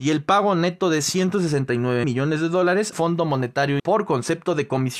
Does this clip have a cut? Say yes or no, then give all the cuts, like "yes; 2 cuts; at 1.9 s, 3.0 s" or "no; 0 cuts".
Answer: yes; 3 cuts; at 2.0 s, 2.9 s, 3.8 s